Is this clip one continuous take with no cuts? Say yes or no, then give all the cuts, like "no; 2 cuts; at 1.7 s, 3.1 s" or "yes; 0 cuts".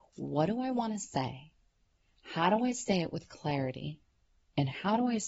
yes; 0 cuts